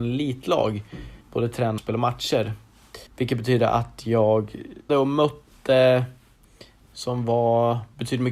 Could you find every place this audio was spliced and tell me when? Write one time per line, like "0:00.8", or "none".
0:01.2
0:01.8
0:03.1
0:04.9
0:06.9